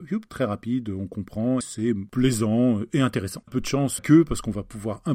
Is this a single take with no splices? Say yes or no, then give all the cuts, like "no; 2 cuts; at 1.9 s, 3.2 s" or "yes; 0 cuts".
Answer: no; 3 cuts; at 1.6 s, 3.5 s, 4.0 s